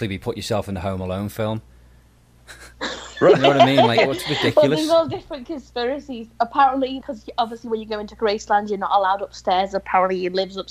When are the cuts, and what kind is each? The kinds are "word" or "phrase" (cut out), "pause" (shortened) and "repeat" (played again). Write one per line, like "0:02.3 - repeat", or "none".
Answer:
0:07.0 - word